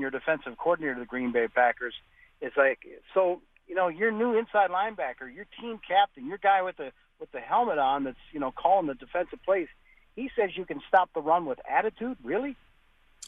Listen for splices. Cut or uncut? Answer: uncut